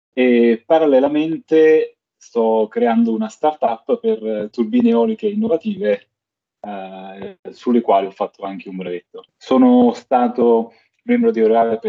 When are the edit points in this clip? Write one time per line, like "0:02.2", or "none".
0:09.3